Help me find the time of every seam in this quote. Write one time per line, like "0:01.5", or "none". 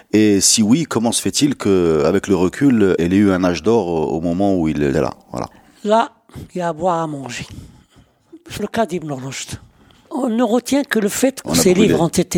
0:03.0
0:04.9
0:08.6
0:11.4

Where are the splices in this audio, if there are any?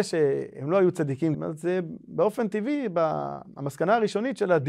0:01.3

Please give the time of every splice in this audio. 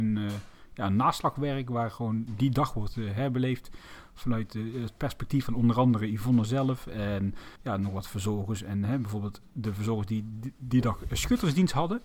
0:07.6

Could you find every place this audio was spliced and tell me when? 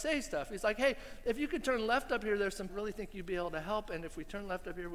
0:02.7

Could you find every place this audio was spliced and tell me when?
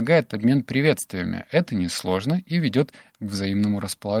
none

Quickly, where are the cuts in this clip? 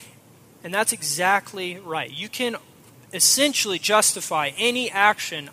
none

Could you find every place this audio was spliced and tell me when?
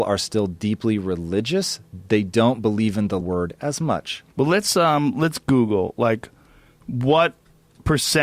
0:03.2
0:04.3

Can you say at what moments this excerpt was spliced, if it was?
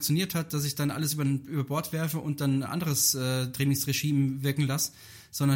none

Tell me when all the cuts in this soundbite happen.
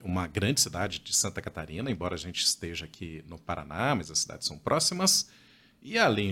none

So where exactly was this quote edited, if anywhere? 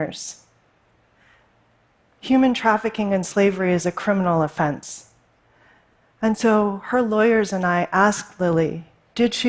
none

